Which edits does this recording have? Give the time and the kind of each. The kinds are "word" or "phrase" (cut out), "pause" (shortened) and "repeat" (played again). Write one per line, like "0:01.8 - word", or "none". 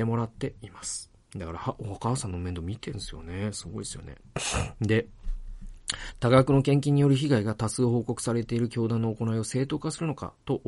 0:01.2 - pause